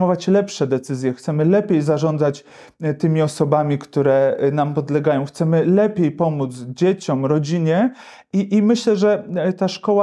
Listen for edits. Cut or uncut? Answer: uncut